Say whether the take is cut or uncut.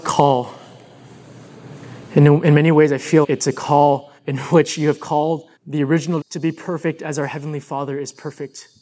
cut